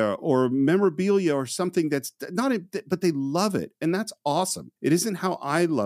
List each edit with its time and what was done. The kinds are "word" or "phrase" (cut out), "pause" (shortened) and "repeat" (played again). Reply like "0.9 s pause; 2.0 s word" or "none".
4.8 s pause